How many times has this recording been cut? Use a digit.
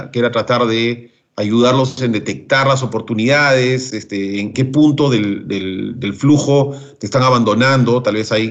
1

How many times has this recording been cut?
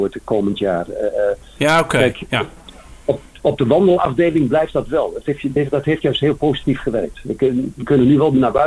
0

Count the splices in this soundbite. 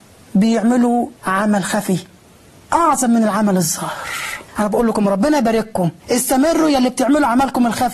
3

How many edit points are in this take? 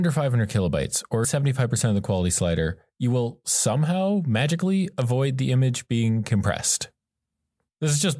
1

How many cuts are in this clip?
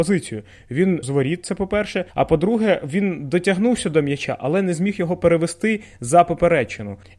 2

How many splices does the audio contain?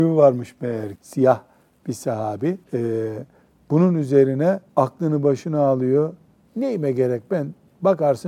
3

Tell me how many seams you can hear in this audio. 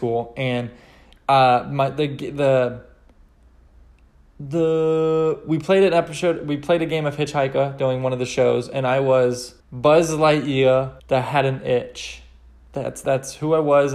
2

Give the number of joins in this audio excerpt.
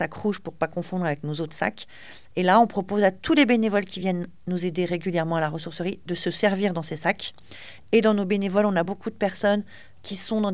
0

